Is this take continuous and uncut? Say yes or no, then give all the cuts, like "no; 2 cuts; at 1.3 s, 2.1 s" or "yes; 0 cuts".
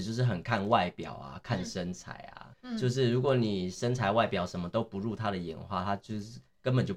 no; 1 cut; at 2.5 s